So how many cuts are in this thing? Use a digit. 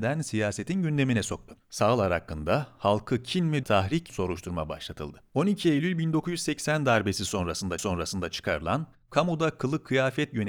3